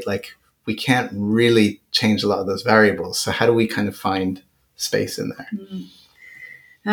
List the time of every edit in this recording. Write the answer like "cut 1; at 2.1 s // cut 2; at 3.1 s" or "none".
none